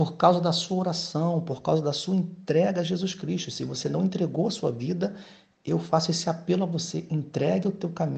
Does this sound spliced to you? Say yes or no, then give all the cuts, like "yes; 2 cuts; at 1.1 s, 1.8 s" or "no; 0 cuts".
no; 0 cuts